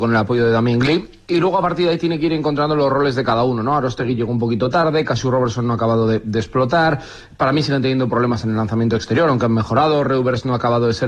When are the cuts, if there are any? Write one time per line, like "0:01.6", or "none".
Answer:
none